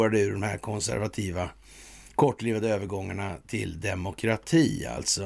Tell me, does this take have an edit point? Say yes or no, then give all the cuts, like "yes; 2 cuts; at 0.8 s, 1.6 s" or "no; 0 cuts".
no; 0 cuts